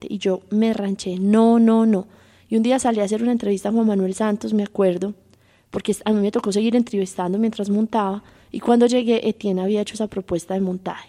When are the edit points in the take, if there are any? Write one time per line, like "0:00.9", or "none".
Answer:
none